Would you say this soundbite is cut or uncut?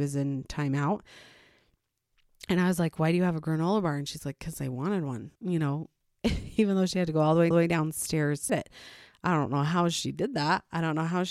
cut